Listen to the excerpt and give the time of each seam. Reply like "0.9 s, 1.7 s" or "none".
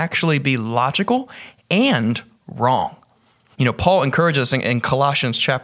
none